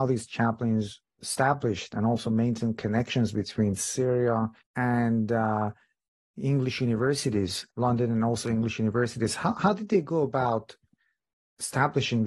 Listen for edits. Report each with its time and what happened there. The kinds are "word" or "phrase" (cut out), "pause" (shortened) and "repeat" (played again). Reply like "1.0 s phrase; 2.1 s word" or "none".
1.2 s word; 4.6 s pause; 7.7 s pause